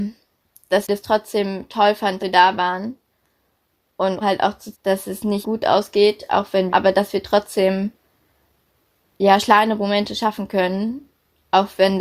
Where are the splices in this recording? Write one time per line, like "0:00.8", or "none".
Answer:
0:02.2
0:04.2
0:04.7
0:05.4
0:06.7
0:09.4